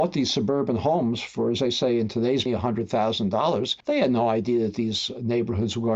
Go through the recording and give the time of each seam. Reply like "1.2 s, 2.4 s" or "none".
2.5 s, 3.8 s